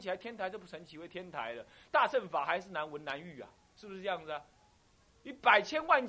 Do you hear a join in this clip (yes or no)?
no